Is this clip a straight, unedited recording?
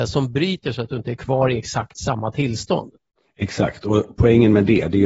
yes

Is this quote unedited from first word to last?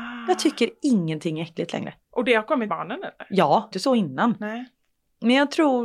no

